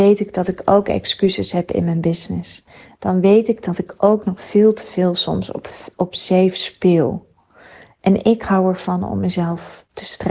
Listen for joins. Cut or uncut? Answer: uncut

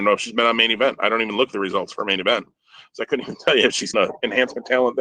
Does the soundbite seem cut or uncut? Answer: cut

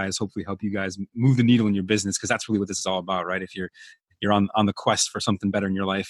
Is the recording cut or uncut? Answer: uncut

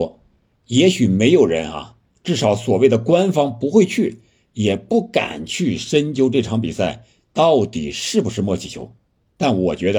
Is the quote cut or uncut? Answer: uncut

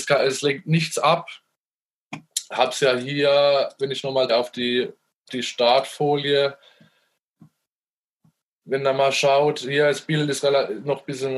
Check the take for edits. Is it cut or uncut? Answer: cut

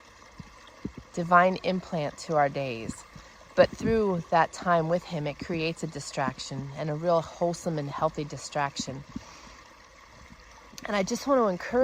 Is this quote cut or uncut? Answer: uncut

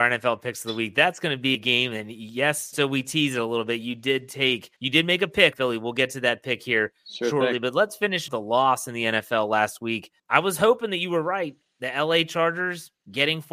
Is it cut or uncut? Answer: cut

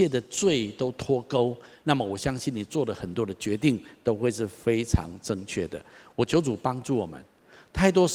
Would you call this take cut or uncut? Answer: uncut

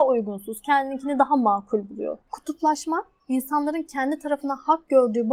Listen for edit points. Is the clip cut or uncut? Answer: cut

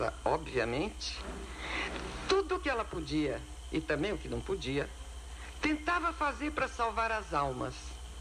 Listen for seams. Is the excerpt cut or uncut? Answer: uncut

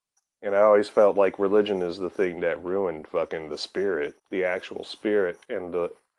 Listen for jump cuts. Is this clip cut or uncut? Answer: cut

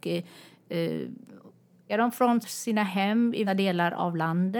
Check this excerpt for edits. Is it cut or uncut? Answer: cut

